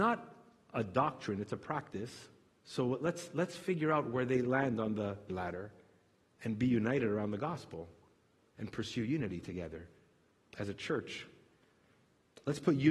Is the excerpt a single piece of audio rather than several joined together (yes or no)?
no